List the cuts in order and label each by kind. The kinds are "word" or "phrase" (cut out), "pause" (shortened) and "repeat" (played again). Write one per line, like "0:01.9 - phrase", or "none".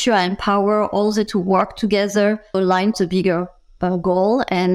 0:01.3 - word
0:02.5 - word
0:02.9 - word